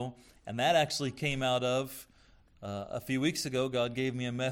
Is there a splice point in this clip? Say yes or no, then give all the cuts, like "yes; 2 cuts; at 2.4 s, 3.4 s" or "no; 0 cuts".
no; 0 cuts